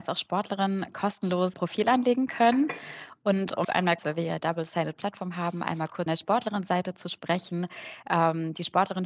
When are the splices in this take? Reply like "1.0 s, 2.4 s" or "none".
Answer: 1.5 s, 3.6 s, 4.0 s, 4.4 s, 6.1 s

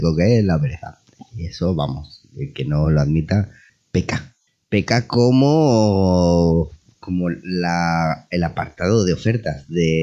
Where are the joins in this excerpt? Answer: none

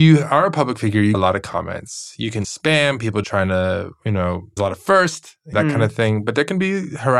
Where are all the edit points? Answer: 1.1 s, 2.4 s, 3.2 s, 4.6 s, 5.5 s

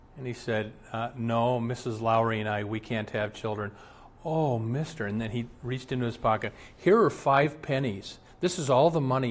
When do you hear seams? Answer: none

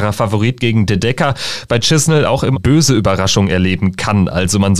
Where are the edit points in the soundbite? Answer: 1.7 s, 2.5 s

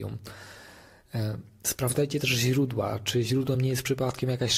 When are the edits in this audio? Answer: none

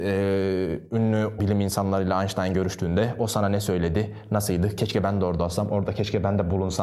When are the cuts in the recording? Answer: 1.4 s

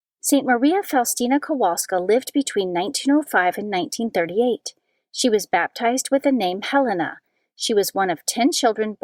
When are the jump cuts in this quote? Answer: none

